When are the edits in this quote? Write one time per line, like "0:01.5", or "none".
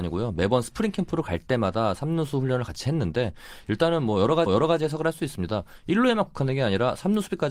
0:04.5